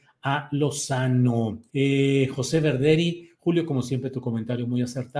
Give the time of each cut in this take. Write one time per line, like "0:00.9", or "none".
0:01.7